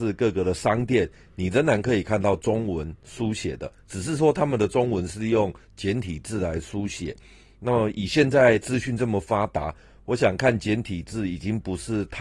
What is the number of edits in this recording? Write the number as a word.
zero